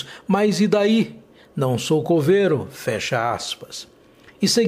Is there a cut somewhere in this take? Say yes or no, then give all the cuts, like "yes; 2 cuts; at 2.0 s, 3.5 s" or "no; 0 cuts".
no; 0 cuts